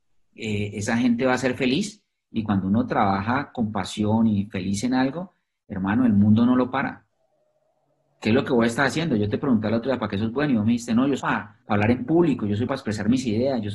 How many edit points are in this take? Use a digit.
3